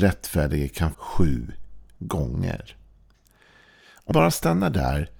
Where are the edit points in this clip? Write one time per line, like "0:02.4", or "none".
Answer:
0:00.9
0:04.1